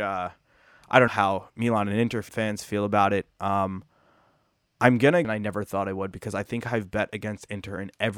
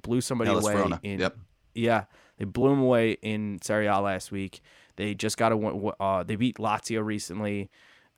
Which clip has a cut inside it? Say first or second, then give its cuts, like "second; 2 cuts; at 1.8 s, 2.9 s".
first; 3 cuts; at 1.1 s, 2.3 s, 5.2 s